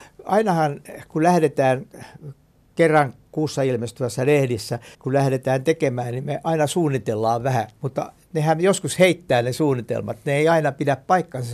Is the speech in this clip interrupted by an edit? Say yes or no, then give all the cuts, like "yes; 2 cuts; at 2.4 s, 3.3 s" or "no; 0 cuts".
yes; 2 cuts; at 2.5 s, 4.9 s